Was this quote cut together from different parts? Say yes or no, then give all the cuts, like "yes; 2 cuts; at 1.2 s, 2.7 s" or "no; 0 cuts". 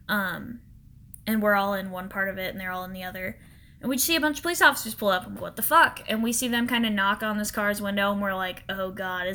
yes; 1 cut; at 5.4 s